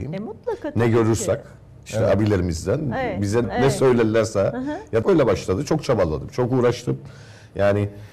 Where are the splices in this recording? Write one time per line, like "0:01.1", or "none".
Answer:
0:03.4
0:05.0